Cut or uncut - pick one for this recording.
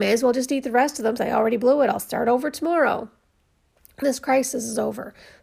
cut